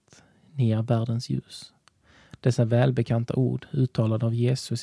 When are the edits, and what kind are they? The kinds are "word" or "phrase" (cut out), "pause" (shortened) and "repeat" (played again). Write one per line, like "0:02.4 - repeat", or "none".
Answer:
none